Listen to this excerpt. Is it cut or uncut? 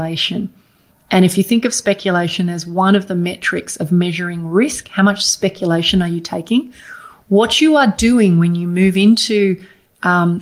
uncut